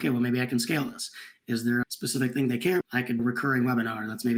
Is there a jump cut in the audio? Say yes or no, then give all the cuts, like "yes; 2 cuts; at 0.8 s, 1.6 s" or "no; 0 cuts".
yes; 3 cuts; at 1.8 s, 2.8 s, 3.2 s